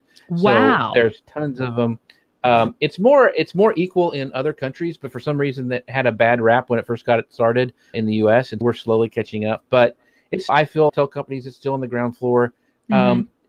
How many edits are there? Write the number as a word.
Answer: four